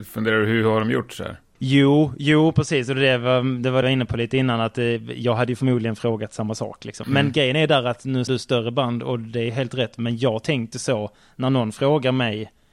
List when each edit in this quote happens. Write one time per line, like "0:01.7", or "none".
0:03.8
0:08.3
0:10.7